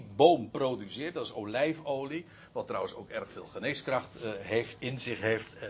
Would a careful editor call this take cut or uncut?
uncut